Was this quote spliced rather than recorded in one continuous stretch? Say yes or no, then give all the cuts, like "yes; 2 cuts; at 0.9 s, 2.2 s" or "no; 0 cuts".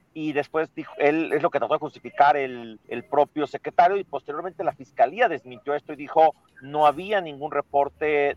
yes; 1 cut; at 2.8 s